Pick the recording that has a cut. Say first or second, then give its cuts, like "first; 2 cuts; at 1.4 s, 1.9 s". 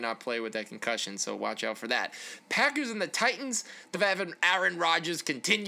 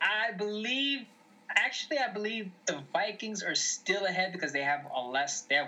first; 1 cut; at 3.9 s